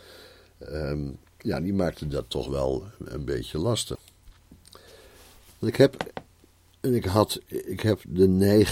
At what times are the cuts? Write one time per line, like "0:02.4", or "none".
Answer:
none